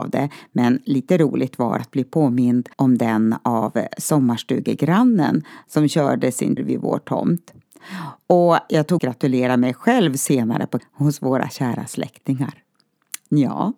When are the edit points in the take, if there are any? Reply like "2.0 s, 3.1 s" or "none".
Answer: 1.8 s, 2.7 s, 6.6 s, 9.0 s, 10.8 s